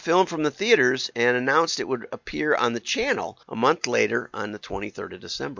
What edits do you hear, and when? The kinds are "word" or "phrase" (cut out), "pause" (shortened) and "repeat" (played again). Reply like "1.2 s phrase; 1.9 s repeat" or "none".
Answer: 3.4 s pause